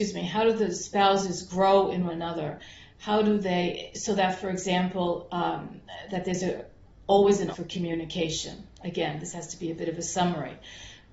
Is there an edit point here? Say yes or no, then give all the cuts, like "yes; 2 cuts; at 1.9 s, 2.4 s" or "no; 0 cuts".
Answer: yes; 2 cuts; at 2.1 s, 7.5 s